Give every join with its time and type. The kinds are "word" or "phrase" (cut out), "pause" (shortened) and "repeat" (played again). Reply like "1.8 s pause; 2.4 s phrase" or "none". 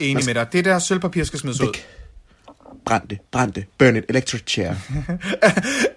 none

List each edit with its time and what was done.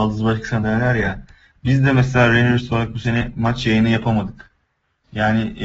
none

